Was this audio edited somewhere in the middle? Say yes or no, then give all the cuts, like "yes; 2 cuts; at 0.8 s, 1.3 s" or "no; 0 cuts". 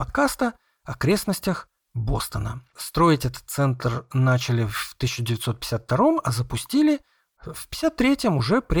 no; 0 cuts